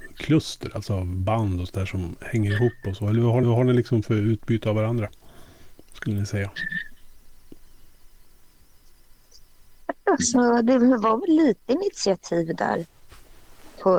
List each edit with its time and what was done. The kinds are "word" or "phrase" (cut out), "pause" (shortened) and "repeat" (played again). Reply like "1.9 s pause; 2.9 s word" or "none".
3.4 s repeat

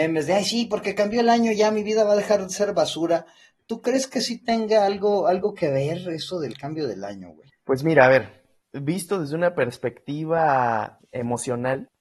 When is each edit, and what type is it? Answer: none

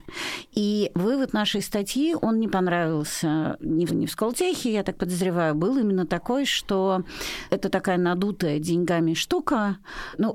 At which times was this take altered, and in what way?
3.9 s word; 7.5 s word

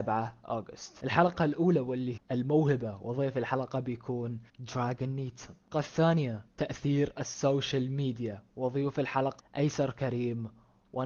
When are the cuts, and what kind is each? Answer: 2.2 s word; 4.5 s pause; 5.7 s word; 8.5 s pause; 9.4 s word

